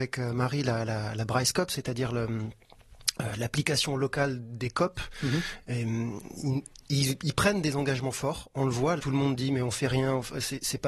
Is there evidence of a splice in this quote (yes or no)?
yes